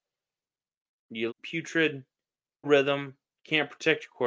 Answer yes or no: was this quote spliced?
yes